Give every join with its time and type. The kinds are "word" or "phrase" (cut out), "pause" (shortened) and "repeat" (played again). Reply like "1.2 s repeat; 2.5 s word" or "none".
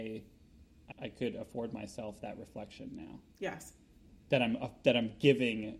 0.9 s word

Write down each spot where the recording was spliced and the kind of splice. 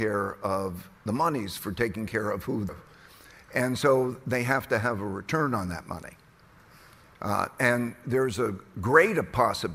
1.0 s pause; 2.7 s phrase

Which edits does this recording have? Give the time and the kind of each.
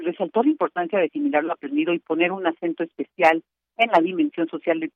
none

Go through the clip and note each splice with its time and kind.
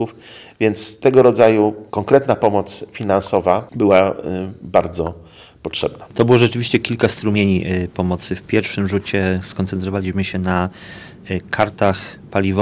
1.9 s pause

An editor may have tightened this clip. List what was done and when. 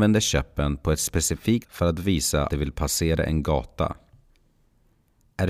1.6 s word; 2.5 s word

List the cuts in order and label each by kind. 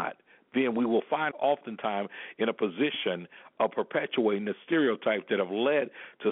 1.3 s word

